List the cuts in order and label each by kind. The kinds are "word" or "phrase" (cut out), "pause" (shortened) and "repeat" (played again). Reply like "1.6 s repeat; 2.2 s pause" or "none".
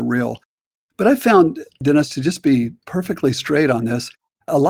2.8 s pause